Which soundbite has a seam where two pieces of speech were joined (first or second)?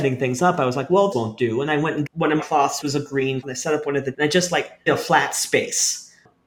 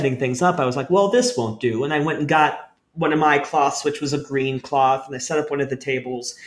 first